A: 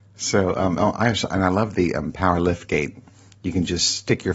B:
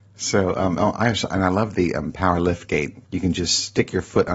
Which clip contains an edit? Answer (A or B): B